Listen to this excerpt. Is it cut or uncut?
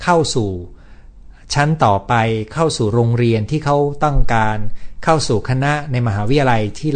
uncut